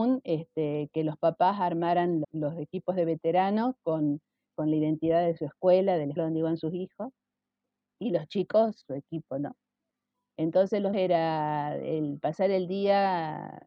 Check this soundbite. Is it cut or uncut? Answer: cut